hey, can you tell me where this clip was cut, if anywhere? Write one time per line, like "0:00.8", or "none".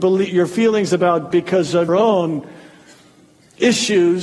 0:01.3
0:01.9